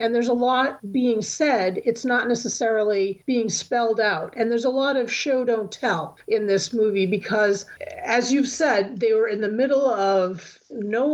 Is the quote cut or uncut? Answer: uncut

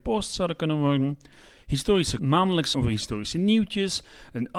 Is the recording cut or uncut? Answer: cut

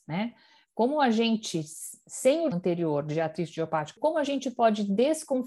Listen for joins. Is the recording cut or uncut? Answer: cut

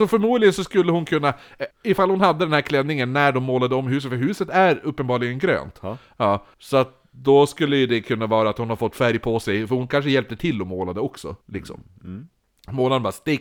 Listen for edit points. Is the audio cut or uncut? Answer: cut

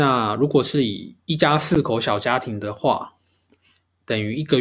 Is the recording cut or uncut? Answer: uncut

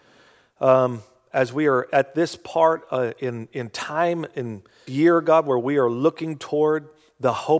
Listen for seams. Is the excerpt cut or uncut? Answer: cut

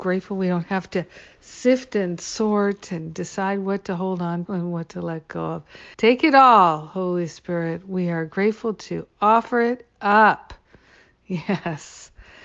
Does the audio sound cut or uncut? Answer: cut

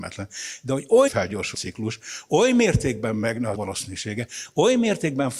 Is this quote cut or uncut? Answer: cut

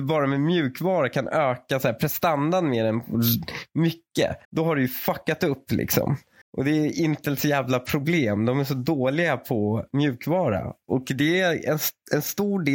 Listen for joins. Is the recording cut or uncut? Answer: cut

